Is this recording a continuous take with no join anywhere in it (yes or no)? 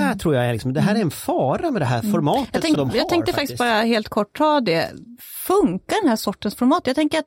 no